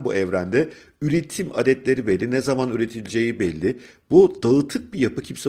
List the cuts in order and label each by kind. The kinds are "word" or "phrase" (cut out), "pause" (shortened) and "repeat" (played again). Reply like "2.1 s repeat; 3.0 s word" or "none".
none

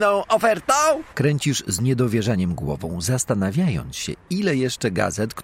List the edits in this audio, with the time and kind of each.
1.1 s pause

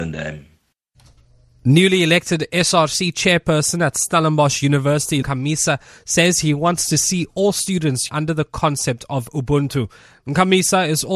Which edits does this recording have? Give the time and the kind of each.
5.2 s word; 8.1 s word

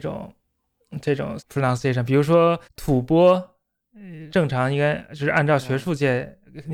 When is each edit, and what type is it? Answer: 1.4 s phrase; 2.6 s pause; 4.3 s word

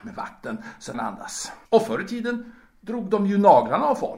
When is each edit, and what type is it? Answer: 0.9 s phrase; 1.7 s pause

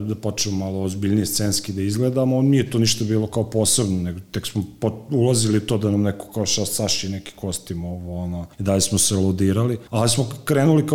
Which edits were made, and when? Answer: 8.5 s pause; 9.9 s pause

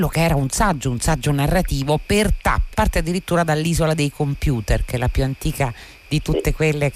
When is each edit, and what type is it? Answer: 2.7 s phrase

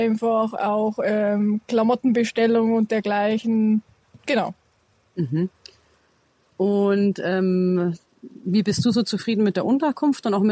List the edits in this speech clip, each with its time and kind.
none

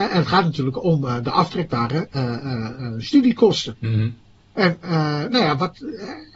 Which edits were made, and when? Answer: 4.4 s pause

